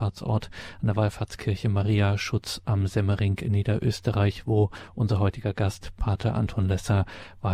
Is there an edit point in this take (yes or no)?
no